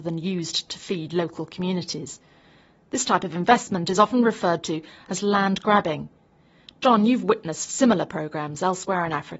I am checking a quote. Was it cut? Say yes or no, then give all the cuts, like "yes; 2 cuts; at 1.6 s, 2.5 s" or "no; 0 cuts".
no; 0 cuts